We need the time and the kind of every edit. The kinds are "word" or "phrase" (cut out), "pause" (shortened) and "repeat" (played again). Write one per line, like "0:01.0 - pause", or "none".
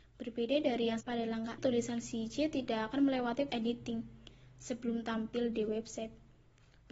0:01.0 - word
0:01.6 - word
0:03.5 - word